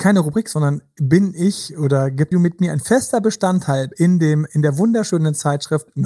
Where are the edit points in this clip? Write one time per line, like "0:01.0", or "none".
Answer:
0:02.3